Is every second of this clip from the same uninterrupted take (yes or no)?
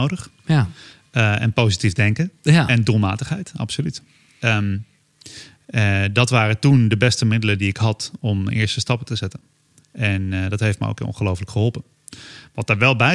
yes